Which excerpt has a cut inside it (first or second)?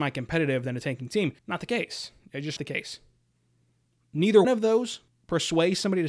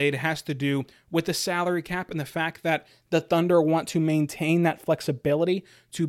first